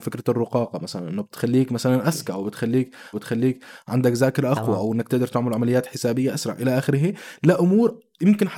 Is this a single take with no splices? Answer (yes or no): no